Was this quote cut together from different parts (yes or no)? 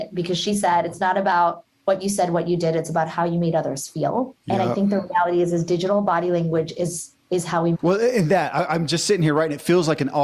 yes